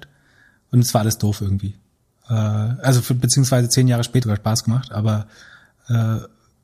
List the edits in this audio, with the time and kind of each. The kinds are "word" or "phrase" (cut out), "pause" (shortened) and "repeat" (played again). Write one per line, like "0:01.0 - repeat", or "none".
0:04.2 - phrase